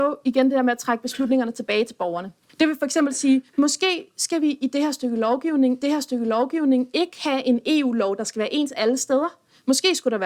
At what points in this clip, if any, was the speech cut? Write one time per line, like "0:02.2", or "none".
0:02.5
0:03.5
0:05.8